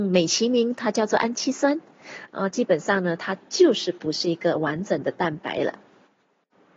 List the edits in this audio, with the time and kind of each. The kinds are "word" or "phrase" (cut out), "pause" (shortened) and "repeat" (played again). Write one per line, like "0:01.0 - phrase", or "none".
none